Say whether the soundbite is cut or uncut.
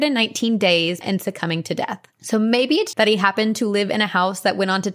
cut